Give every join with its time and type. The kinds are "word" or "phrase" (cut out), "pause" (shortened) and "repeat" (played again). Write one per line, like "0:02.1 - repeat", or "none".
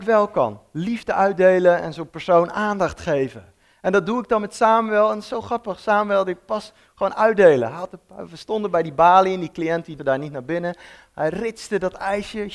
0:10.0 - word